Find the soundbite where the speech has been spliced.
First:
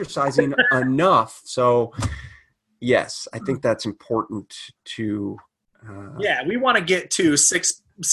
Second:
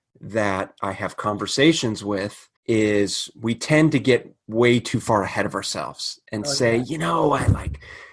second; 1 cut; at 2.6 s

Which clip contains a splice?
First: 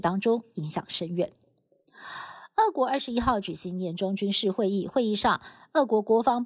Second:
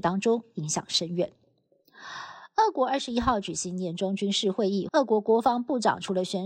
second; 1 cut; at 4.9 s

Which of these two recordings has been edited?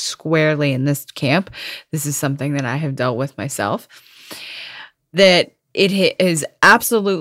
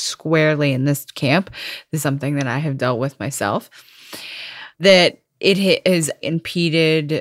second; 3 cuts; at 2.0 s, 4.7 s, 6.2 s

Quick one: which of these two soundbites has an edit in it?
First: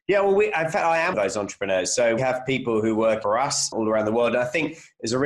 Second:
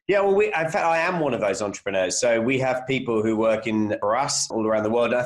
first; 3 cuts; at 1.1 s, 2.2 s, 3.2 s

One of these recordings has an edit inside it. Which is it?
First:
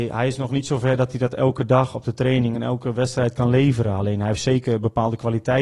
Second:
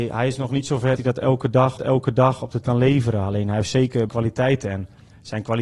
second; 4 cuts; at 1.0 s, 1.8 s, 2.6 s, 4.1 s

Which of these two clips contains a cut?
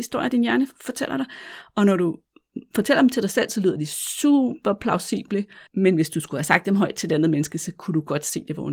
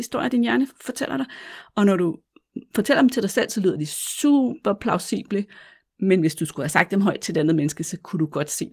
first; 1 cut; at 5.7 s

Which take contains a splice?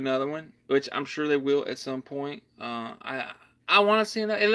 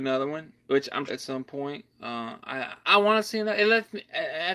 second; 2 cuts; at 1.1 s, 2.8 s

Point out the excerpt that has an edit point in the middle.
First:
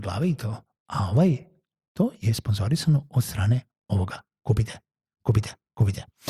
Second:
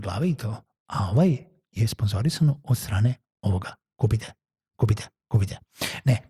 second; 1 cut; at 1.7 s

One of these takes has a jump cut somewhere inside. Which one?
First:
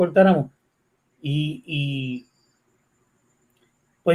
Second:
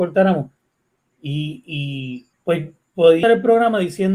second; 2 cuts; at 2.3 s, 3.2 s

